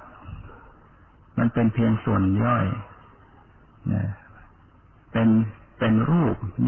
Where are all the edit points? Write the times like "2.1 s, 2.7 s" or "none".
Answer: none